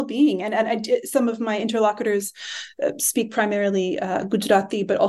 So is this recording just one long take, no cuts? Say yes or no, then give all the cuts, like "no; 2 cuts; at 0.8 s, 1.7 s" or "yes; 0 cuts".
yes; 0 cuts